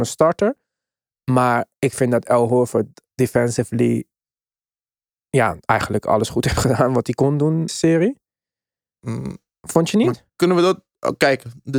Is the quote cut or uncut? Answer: cut